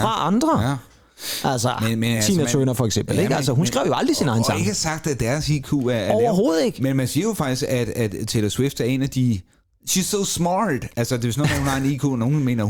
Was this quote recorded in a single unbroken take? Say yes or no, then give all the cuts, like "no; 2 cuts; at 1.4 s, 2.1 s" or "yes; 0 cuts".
yes; 0 cuts